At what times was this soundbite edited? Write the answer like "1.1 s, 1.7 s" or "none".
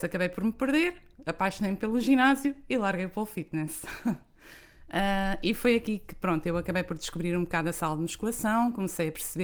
none